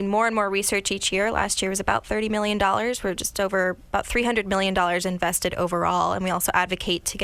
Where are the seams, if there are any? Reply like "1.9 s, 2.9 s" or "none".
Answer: none

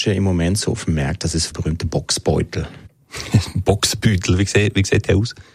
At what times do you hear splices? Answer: 1.5 s

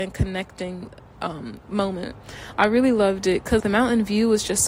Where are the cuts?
3.6 s

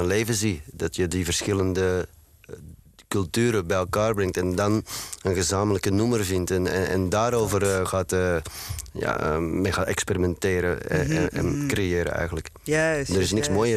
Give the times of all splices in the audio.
none

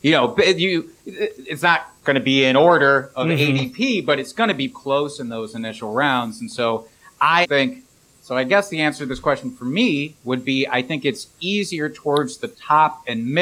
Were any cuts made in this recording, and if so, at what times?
4.7 s, 7.4 s

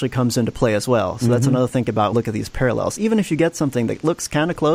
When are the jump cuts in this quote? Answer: 1.7 s, 2.1 s

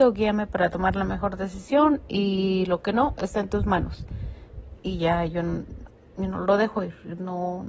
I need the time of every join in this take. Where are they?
none

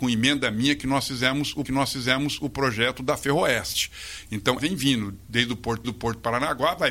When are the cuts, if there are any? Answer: 1.7 s, 4.6 s, 5.8 s

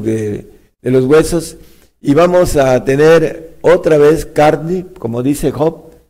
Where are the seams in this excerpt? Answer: none

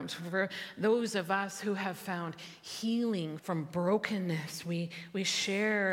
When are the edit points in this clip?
3.4 s

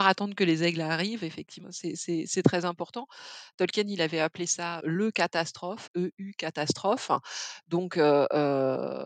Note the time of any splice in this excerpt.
1.6 s, 4.8 s, 5.9 s

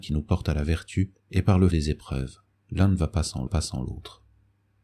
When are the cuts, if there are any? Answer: 1.2 s, 1.7 s, 2.5 s, 3.5 s

